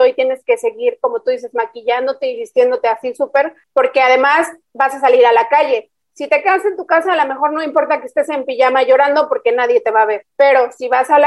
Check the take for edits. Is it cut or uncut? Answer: uncut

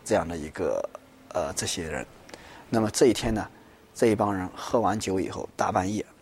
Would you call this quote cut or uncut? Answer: uncut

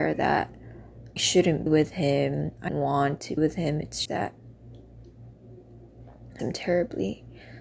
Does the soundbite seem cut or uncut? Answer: cut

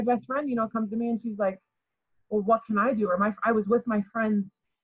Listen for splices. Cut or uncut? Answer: uncut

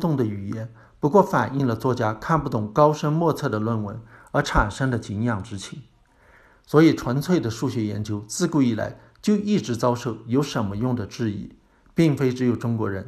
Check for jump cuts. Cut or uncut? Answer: uncut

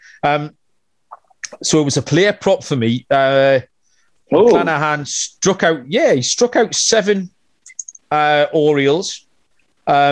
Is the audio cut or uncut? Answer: uncut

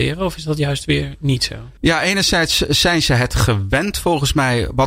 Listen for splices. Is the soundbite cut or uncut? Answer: cut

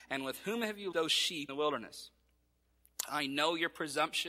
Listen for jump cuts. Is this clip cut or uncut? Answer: cut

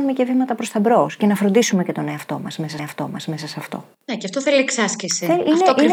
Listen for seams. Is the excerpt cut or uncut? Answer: cut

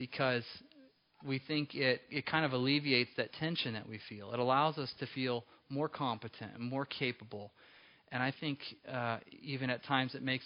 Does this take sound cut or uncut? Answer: uncut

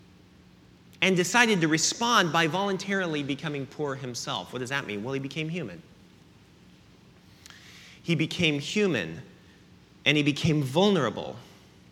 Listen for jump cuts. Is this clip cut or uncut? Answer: uncut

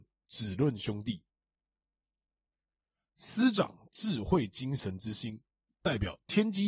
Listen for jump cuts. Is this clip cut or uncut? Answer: uncut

